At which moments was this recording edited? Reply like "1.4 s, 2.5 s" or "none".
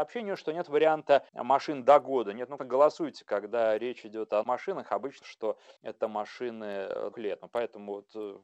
1.3 s, 2.6 s, 4.4 s, 5.2 s, 5.8 s, 7.1 s